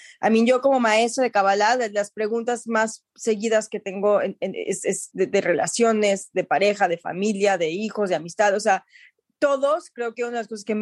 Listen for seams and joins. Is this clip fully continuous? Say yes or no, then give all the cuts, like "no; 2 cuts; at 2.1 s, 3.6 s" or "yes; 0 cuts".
yes; 0 cuts